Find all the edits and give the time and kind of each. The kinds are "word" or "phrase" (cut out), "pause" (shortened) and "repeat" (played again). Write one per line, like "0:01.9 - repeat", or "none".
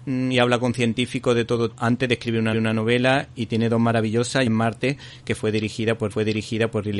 0:01.7 - word
0:02.5 - repeat
0:04.5 - phrase
0:06.1 - repeat

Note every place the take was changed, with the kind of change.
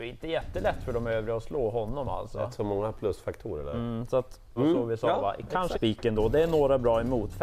0:04.6 - phrase
0:05.7 - word

